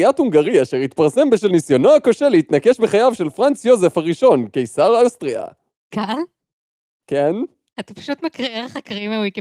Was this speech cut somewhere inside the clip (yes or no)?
no